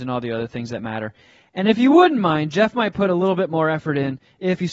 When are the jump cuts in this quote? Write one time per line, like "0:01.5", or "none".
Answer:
none